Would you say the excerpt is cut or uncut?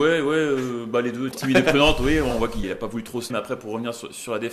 cut